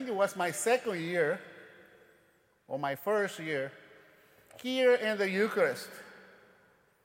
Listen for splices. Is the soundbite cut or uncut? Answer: uncut